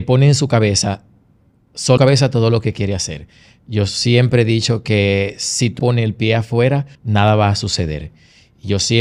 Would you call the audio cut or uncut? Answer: cut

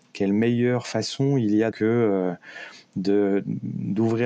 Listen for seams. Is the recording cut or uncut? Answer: cut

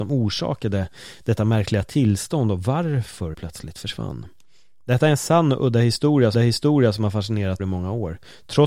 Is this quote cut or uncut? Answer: cut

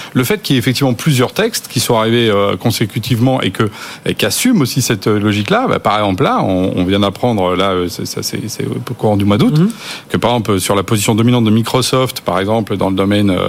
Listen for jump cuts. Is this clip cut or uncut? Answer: uncut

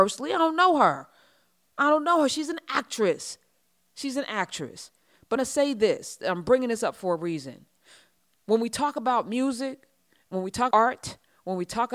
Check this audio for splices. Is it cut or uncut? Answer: cut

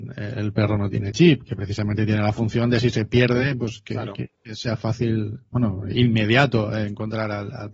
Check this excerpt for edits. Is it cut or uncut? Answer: uncut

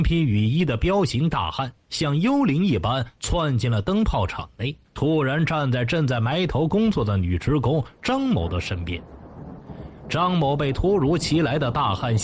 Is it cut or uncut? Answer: cut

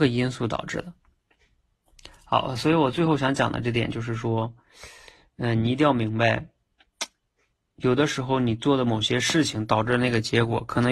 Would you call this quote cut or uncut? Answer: uncut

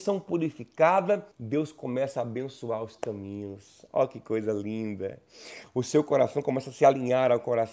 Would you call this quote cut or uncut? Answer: cut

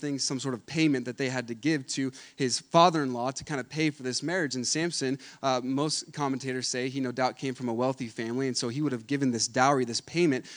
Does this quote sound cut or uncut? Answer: uncut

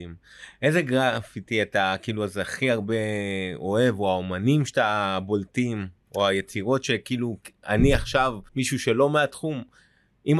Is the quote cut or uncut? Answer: cut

